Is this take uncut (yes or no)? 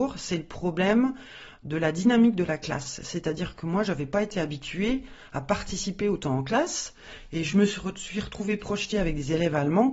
yes